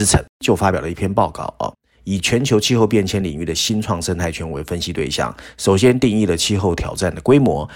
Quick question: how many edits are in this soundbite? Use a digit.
0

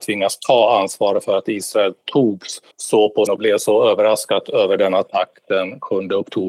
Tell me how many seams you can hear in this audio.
2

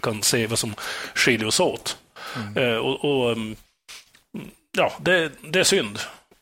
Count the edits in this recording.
0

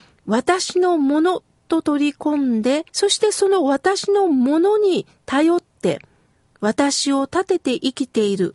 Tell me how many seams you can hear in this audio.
1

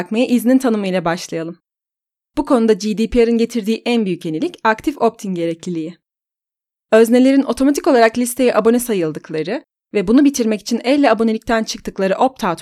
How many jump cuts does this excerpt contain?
0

